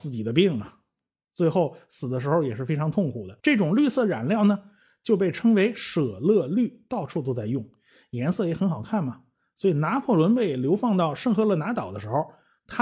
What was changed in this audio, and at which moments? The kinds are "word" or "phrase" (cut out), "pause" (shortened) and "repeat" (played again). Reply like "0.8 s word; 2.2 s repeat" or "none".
3.4 s pause